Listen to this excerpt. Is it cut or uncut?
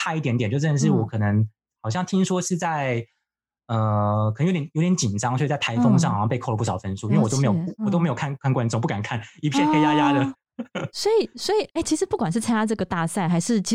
uncut